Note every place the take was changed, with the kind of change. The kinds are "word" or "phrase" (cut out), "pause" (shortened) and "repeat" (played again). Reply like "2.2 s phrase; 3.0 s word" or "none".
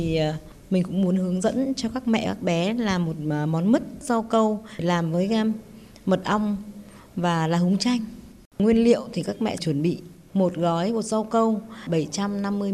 none